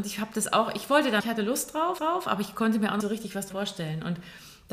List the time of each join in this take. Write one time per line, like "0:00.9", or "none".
0:01.2
0:02.0
0:03.0
0:03.5